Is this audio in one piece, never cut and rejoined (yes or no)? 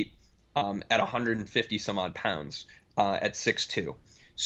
yes